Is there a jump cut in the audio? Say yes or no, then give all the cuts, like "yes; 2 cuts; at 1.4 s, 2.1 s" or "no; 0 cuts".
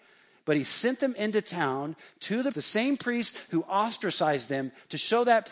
yes; 1 cut; at 2.5 s